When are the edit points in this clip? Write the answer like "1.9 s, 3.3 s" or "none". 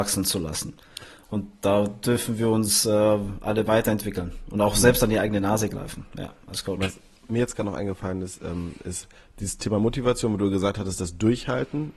none